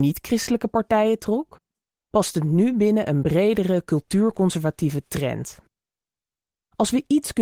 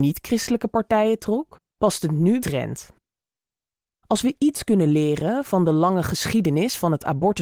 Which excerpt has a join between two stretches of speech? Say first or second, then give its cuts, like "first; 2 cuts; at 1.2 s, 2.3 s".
second; 2 cuts; at 1.7 s, 2.4 s